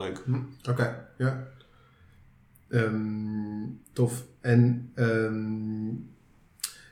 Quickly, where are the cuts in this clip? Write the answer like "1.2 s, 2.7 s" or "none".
3.8 s